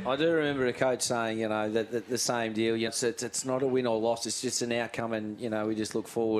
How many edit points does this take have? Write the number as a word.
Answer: one